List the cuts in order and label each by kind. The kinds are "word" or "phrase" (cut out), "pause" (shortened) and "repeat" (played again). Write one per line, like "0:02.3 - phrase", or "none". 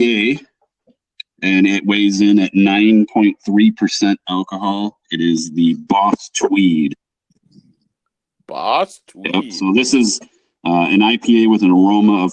none